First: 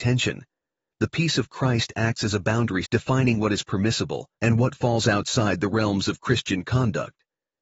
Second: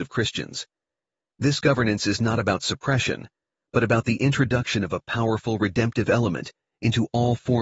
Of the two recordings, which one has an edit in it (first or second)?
first